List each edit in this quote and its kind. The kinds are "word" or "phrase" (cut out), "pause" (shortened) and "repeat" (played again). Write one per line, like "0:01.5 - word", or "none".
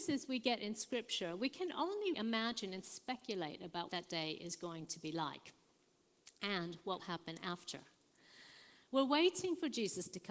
0:02.1 - word
0:03.9 - word
0:07.0 - word